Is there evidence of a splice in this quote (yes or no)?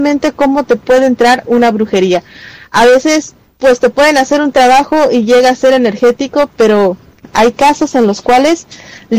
no